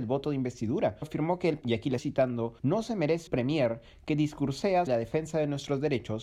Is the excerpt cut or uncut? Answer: cut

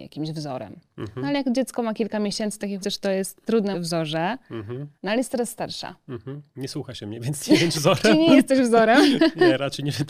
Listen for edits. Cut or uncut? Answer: cut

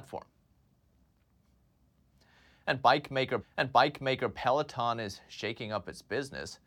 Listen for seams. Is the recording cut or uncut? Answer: cut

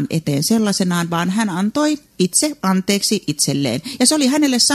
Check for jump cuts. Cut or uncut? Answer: cut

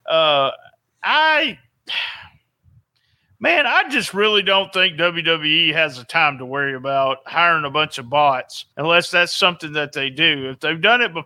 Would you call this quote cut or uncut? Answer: cut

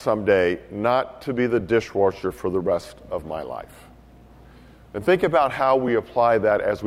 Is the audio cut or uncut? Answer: uncut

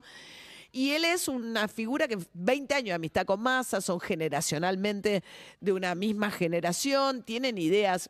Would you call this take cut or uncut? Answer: uncut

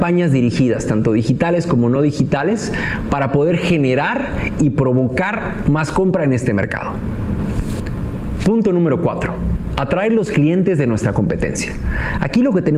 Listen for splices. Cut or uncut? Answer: uncut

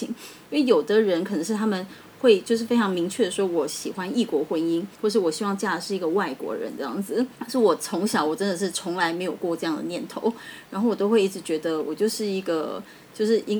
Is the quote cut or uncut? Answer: cut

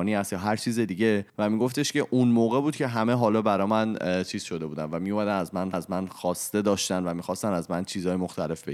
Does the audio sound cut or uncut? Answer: cut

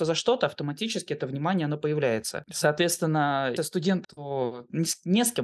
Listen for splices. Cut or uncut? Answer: cut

